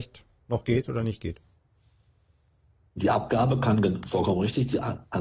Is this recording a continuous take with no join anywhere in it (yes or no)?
yes